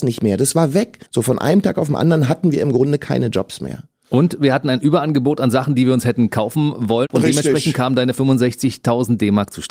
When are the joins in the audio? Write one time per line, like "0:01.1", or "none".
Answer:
0:01.1